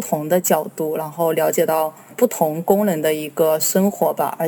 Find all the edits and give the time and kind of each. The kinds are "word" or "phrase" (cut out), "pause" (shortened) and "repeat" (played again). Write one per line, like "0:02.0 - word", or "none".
0:02.1 - word